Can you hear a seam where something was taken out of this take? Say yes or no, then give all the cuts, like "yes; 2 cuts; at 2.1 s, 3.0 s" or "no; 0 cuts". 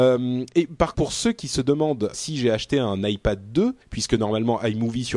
yes; 3 cuts; at 0.9 s, 2.1 s, 3.8 s